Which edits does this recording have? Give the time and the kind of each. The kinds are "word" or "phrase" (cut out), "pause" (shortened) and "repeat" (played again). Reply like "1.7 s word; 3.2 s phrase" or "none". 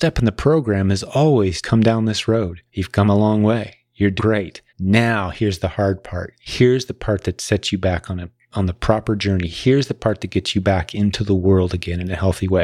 1.6 s phrase; 2.7 s pause; 4.2 s word; 4.7 s pause